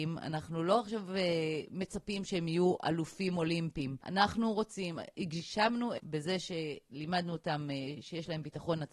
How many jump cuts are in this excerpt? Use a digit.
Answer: 1